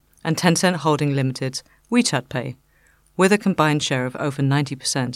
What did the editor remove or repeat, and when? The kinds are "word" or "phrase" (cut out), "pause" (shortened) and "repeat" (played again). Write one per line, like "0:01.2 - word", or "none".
none